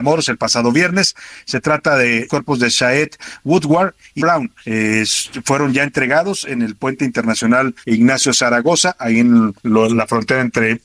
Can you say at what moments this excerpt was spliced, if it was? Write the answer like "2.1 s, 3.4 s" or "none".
2.3 s, 4.2 s, 4.6 s, 7.8 s, 9.6 s